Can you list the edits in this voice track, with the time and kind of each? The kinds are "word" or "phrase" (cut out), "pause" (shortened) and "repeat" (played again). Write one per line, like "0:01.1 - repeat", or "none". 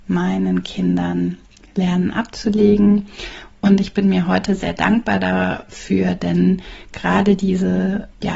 none